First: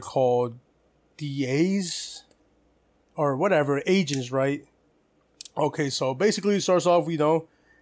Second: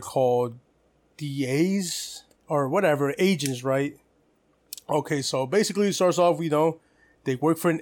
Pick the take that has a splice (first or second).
second